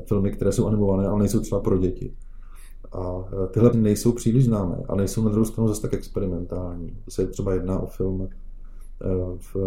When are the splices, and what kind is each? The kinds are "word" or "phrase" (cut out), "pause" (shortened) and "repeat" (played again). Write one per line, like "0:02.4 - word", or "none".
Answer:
0:01.6 - word
0:03.7 - phrase